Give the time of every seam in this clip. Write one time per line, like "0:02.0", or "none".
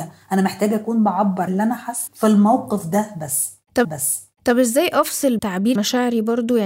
0:01.5
0:02.1
0:03.8
0:05.4
0:05.8